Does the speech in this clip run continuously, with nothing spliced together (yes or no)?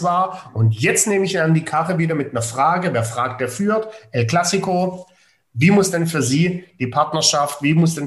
yes